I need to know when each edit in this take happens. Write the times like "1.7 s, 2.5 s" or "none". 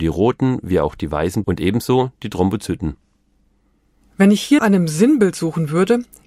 1.4 s, 4.6 s